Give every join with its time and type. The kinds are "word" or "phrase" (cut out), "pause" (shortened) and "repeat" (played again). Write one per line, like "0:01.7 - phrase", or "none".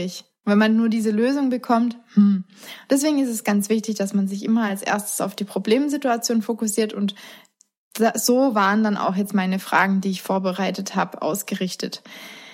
none